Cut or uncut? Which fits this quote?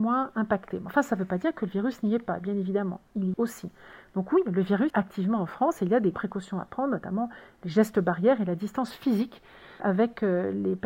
cut